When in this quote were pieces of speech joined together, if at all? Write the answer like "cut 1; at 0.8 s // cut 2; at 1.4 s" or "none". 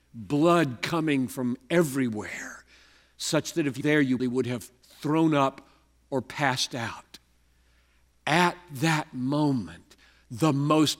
cut 1; at 3.8 s // cut 2; at 4.2 s